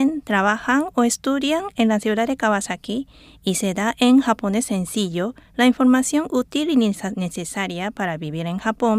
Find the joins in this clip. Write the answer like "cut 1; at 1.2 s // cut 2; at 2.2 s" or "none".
none